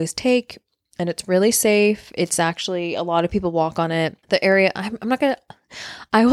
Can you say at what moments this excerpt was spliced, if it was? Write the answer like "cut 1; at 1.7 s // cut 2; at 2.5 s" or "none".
cut 1; at 4.2 s